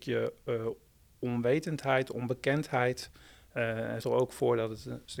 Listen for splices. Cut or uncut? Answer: cut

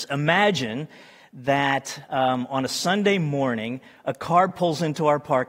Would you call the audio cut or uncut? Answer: uncut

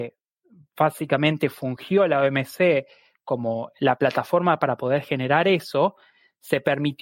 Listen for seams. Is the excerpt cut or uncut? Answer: uncut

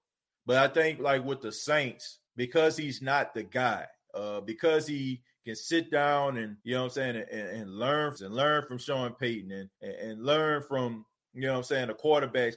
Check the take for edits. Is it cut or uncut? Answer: cut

